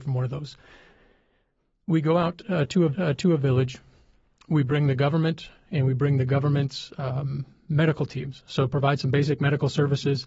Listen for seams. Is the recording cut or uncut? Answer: cut